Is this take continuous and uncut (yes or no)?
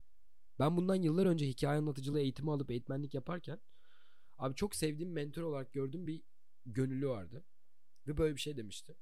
yes